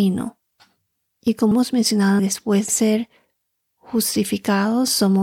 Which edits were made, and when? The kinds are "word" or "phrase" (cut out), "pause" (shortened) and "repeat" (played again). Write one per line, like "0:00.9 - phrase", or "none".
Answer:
0:01.5 - word
0:02.2 - word
0:02.7 - word